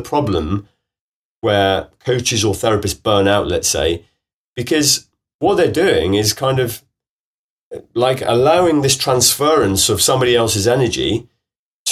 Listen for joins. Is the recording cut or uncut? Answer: uncut